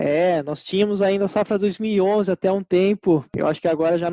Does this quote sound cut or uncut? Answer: uncut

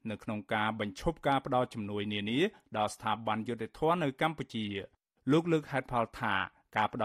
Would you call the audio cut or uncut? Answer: uncut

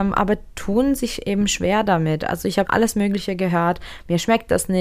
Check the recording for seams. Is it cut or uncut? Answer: cut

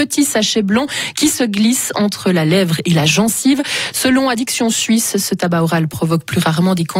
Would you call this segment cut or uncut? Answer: uncut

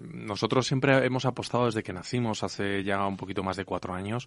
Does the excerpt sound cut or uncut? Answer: uncut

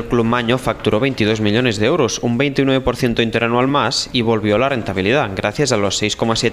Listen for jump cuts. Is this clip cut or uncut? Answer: uncut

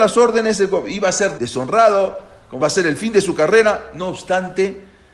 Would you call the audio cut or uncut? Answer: cut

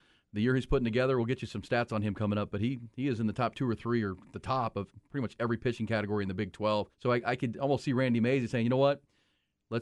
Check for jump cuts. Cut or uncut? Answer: cut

